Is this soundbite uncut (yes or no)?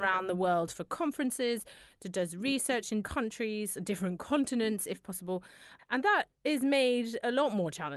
no